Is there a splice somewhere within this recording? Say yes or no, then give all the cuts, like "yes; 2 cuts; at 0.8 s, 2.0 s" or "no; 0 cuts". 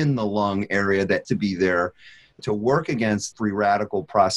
yes; 3 cuts; at 1.2 s, 2.4 s, 3.3 s